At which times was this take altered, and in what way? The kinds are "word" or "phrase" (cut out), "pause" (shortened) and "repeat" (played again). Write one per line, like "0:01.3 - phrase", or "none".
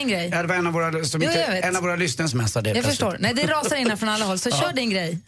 0:02.3 - phrase